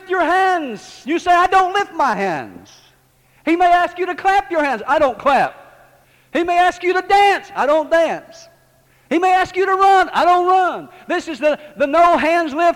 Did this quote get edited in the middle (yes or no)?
no